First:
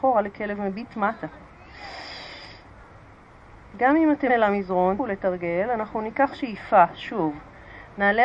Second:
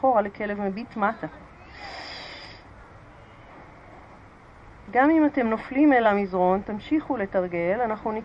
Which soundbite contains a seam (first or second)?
first